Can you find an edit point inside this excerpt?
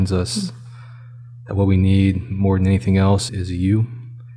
yes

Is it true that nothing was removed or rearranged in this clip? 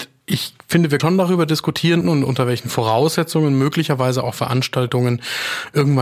no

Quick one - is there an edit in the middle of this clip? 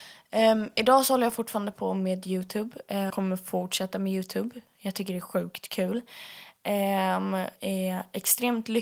yes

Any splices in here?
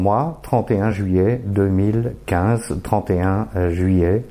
no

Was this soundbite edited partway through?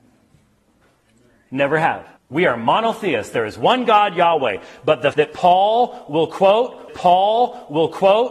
yes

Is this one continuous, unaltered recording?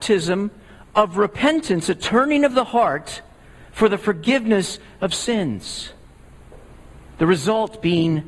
yes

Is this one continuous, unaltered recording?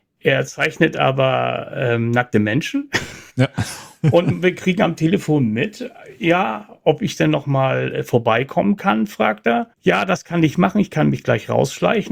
no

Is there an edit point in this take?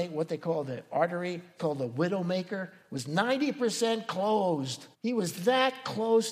yes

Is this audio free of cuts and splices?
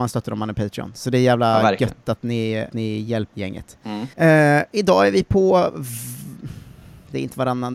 no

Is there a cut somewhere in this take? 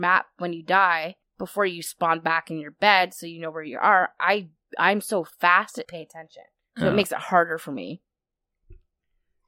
yes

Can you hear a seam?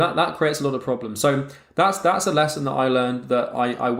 no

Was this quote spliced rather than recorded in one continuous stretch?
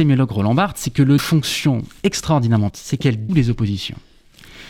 yes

